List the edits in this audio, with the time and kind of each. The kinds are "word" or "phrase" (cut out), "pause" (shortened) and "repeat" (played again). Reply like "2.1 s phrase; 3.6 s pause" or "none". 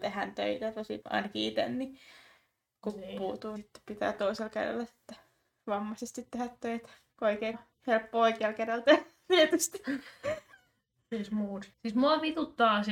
1.0 s word; 3.6 s word; 7.5 s word; 11.7 s pause